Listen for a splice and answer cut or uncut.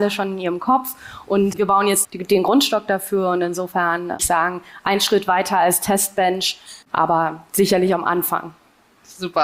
cut